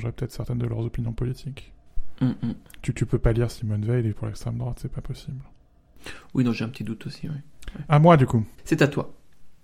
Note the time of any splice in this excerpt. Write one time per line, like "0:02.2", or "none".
0:04.1
0:08.5